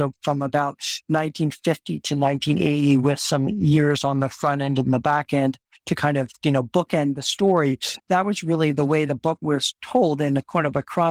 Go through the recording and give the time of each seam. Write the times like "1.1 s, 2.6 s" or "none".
none

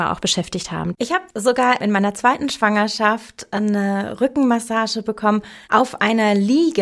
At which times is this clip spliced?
5.6 s

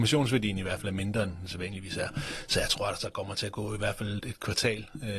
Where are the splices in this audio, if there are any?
4.2 s

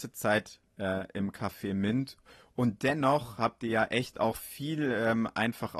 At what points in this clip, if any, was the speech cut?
none

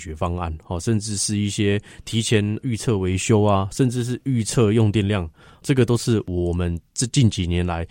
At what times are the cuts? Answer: none

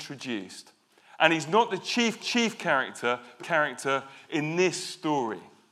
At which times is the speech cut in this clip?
2.2 s, 3.4 s

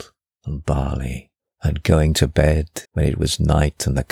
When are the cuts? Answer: 2.8 s

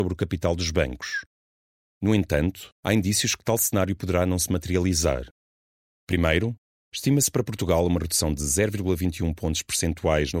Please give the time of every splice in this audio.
2.8 s

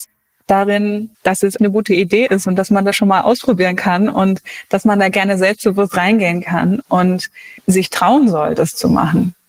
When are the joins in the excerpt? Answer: 1.1 s, 1.6 s, 7.6 s

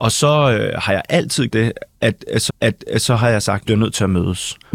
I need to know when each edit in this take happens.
1.5 s, 2.5 s, 3.6 s

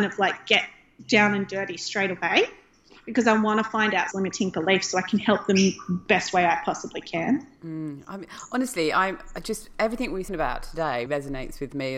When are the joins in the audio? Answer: 4.1 s, 10.3 s, 11.1 s

